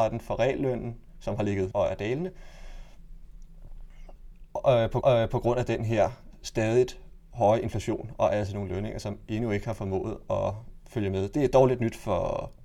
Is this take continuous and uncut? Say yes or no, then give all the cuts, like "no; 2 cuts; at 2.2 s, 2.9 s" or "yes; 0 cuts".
no; 2 cuts; at 1.7 s, 5.0 s